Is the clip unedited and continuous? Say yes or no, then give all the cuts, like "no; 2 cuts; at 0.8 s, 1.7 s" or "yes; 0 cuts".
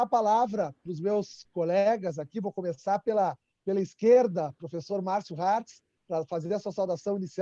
yes; 0 cuts